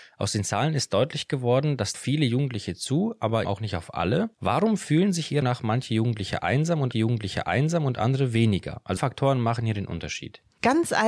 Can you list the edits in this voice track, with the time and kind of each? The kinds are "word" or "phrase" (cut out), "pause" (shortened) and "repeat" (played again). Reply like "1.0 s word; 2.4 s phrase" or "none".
1.9 s phrase; 3.4 s word; 4.3 s pause; 5.4 s word; 6.9 s repeat; 9.0 s word